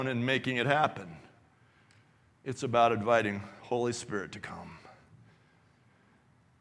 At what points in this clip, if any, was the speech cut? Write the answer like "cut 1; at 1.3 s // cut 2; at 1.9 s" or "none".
none